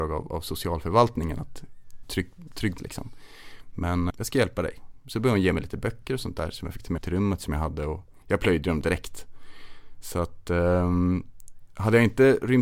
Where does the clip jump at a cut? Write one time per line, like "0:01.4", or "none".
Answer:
0:02.0
0:02.8
0:04.1
0:07.0
0:08.2
0:08.8